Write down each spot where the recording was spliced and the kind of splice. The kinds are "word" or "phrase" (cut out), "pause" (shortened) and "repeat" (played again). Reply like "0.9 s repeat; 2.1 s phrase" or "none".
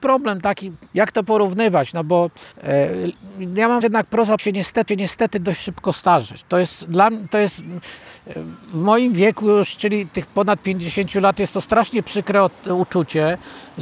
2.5 s pause; 3.8 s word; 4.4 s word; 4.9 s repeat